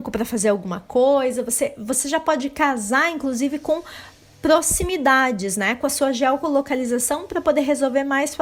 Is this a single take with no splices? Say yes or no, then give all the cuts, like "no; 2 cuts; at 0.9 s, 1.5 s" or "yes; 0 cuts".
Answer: yes; 0 cuts